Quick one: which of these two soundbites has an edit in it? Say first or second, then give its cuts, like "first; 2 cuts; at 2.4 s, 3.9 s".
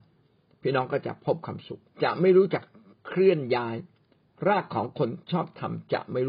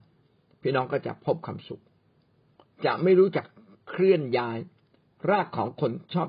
first; 1 cut; at 1.9 s